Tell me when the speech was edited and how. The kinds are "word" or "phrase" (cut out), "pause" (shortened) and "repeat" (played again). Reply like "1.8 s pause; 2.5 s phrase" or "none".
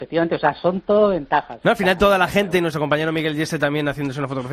none